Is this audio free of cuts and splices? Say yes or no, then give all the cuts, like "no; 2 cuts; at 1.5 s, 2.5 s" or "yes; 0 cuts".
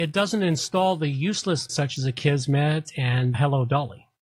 no; 2 cuts; at 1.7 s, 3.3 s